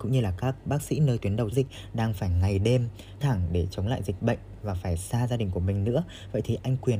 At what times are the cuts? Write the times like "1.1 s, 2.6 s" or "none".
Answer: 1.5 s, 3.2 s